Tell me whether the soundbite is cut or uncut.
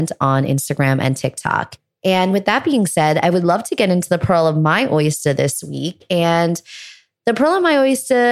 uncut